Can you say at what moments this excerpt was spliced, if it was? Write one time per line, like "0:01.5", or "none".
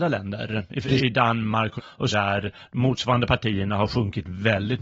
0:01.0
0:01.8
0:02.1